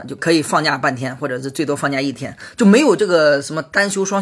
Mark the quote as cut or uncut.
uncut